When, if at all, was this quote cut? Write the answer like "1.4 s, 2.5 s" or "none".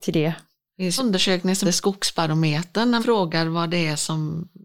1.0 s, 1.6 s, 3.0 s